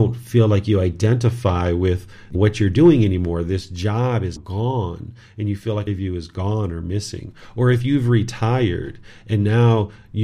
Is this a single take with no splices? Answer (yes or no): no